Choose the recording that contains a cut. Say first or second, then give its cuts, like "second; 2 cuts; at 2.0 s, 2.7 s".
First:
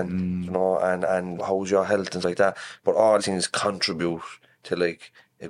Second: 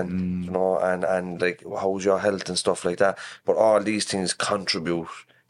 first; 3 cuts; at 1.4 s, 2.2 s, 3.2 s